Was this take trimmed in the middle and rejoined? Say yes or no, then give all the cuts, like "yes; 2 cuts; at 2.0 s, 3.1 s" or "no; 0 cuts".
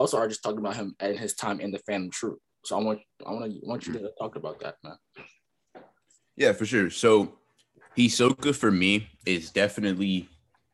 no; 0 cuts